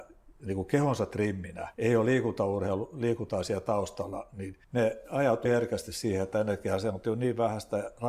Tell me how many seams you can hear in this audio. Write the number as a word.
three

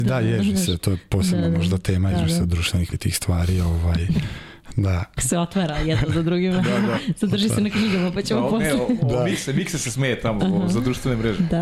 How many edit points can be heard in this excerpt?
three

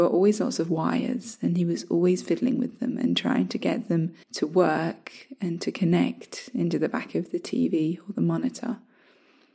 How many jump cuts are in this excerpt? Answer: one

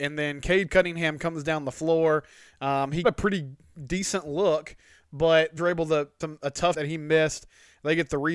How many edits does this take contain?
four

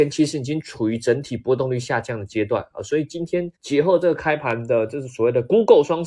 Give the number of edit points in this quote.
one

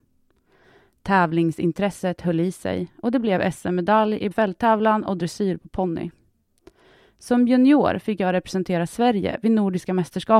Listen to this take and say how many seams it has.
one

